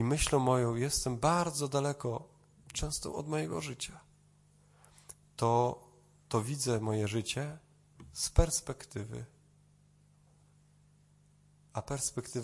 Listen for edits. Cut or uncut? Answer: uncut